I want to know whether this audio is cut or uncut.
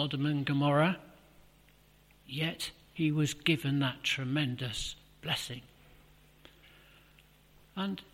uncut